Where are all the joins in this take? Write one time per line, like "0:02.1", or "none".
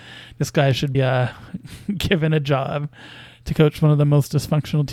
0:00.9